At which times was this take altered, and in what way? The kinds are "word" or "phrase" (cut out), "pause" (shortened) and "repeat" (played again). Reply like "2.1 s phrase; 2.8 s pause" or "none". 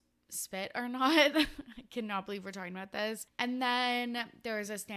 none